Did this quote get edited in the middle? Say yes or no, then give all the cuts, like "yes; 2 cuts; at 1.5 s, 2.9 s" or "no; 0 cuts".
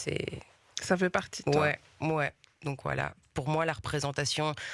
no; 0 cuts